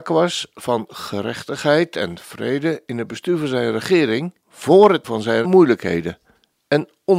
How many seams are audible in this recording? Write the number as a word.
three